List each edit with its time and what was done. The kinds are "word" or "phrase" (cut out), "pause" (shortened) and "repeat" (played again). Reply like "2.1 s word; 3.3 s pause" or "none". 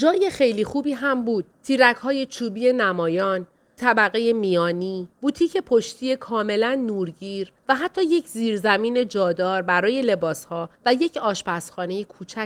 1.5 s pause; 3.8 s word; 5.1 s pause; 7.6 s pause; 10.7 s pause